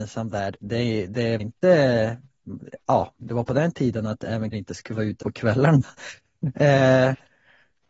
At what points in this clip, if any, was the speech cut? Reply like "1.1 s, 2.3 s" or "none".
1.4 s, 3.2 s, 4.5 s, 5.2 s